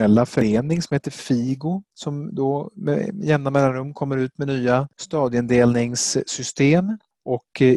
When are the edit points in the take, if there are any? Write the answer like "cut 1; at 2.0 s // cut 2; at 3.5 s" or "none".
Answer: none